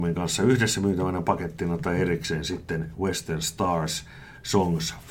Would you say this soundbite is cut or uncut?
uncut